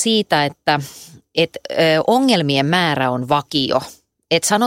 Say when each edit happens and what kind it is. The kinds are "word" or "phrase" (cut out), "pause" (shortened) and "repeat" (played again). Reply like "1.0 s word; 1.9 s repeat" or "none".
none